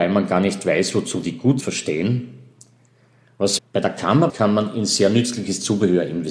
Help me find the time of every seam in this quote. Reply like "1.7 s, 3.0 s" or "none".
1.6 s, 3.6 s, 4.3 s